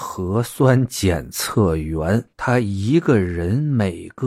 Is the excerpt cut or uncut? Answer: cut